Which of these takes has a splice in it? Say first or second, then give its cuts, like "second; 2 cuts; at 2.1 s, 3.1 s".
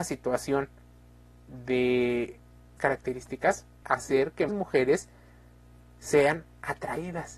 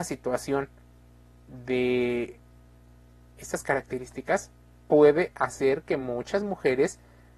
first; 3 cuts; at 2.8 s, 3.8 s, 4.5 s